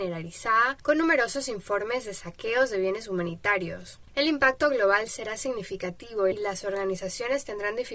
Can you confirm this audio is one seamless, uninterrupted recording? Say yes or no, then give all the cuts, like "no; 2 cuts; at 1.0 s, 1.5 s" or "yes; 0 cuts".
yes; 0 cuts